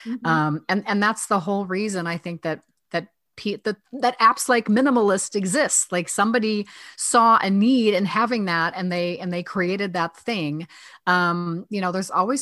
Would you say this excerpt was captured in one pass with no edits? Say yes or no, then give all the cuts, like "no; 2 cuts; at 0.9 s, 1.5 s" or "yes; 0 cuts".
yes; 0 cuts